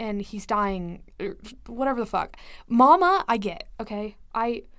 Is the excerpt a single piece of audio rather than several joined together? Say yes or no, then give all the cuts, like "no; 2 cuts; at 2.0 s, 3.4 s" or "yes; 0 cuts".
yes; 0 cuts